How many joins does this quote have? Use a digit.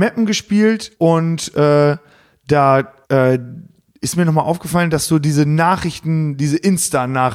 2